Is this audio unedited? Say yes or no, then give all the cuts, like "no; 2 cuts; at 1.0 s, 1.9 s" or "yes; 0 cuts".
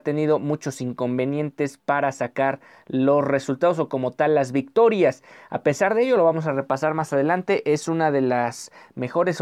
yes; 0 cuts